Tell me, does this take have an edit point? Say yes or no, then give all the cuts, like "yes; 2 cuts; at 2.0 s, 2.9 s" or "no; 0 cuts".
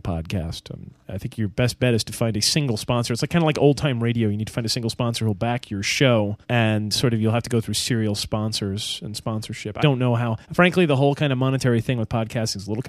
yes; 3 cuts; at 6.4 s, 9.8 s, 10.4 s